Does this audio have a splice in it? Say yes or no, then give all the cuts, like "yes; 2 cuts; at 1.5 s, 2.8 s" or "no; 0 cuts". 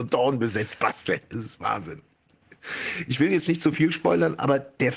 no; 0 cuts